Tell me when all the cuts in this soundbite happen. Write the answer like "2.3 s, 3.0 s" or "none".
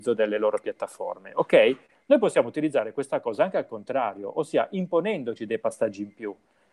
none